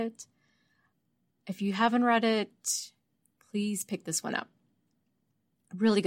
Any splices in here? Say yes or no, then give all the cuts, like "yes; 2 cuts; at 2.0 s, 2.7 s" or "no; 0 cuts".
no; 0 cuts